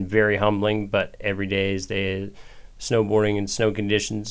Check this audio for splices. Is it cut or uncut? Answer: cut